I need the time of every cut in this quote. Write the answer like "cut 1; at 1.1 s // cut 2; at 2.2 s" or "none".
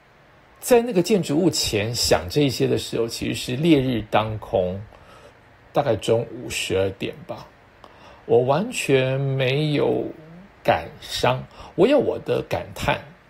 none